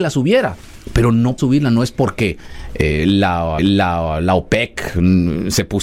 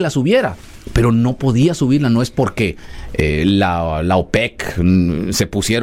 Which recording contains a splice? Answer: first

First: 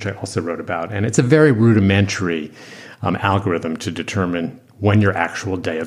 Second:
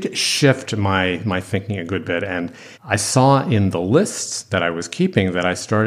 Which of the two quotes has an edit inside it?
second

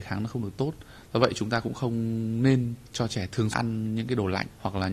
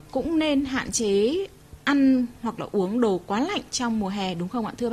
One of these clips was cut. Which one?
first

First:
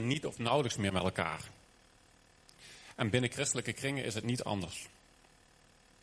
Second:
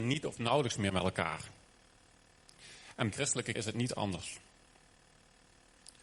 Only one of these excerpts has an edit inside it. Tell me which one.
second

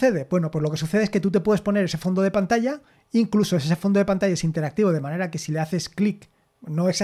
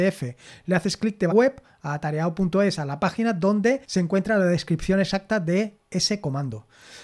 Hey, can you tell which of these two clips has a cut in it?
second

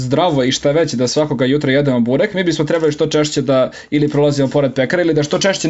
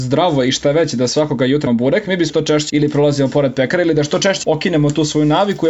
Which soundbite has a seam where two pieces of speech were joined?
second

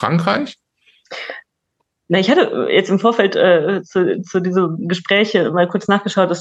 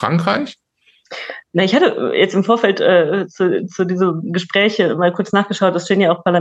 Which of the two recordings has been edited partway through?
second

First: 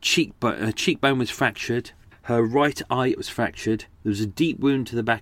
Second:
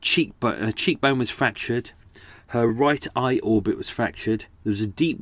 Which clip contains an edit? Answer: first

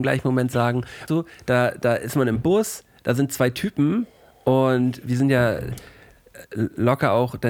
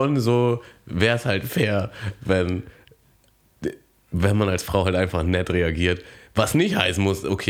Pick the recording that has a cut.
first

